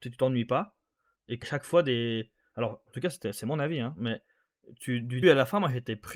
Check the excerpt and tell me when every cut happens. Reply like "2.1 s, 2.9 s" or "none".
1.4 s, 5.2 s